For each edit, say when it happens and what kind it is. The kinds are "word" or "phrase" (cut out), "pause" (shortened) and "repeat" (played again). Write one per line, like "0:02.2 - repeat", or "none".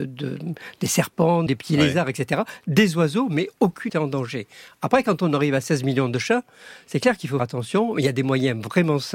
0:01.5 - word
0:03.9 - phrase
0:07.4 - word